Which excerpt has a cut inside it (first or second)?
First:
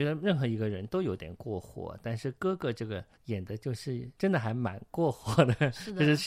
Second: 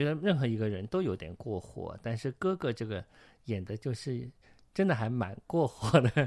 first